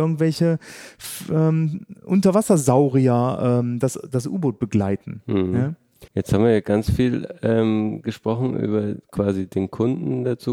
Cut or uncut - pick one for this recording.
cut